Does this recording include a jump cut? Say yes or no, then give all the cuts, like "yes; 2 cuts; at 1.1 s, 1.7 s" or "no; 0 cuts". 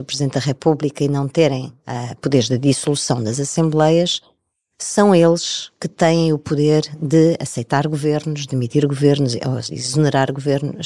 no; 0 cuts